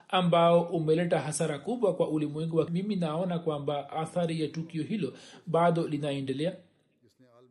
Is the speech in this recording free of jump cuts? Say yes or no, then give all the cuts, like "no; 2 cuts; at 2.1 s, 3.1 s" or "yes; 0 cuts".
no; 1 cut; at 2.7 s